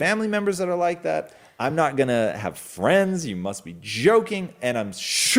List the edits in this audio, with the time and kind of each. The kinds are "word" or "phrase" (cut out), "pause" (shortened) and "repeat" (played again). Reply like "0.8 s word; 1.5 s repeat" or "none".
none